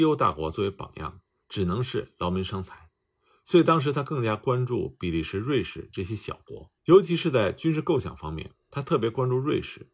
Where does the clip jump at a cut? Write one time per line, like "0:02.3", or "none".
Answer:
0:06.8
0:08.6